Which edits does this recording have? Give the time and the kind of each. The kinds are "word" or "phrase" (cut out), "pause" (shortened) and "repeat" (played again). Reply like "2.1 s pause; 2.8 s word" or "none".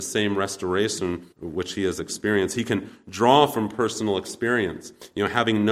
1.3 s pause